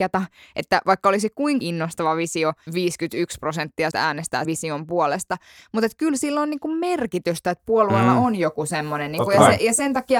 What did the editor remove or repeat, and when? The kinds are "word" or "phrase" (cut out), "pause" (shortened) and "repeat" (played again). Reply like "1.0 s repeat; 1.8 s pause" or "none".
1.6 s word; 2.7 s word; 3.9 s word; 4.4 s word